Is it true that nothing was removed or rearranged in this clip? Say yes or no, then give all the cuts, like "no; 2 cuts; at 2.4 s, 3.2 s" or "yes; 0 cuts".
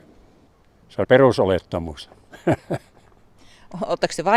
no; 1 cut; at 1.0 s